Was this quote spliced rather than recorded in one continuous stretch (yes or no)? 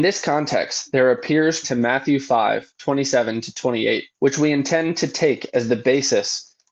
yes